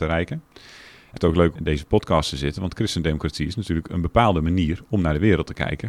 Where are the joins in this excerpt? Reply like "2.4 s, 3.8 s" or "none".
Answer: 1.2 s, 1.6 s

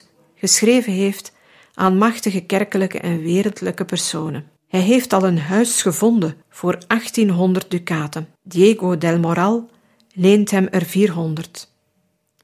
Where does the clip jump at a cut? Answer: 4.6 s, 6.4 s, 8.4 s

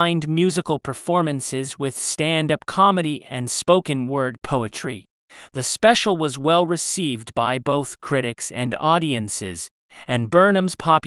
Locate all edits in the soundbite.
none

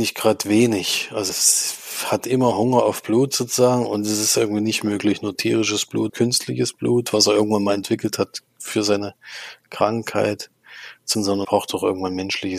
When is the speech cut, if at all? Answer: 1.3 s, 6.1 s, 11.1 s, 11.4 s

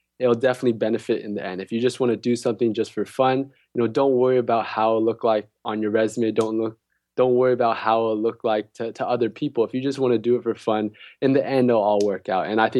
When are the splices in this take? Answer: none

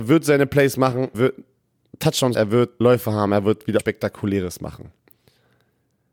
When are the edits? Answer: 1.1 s, 2.3 s, 2.8 s, 3.8 s

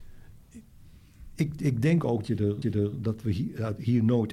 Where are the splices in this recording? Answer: 2.2 s, 2.6 s

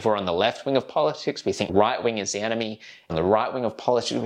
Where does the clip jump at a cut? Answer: 1.7 s, 3.1 s

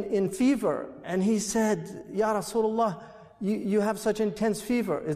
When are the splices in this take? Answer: none

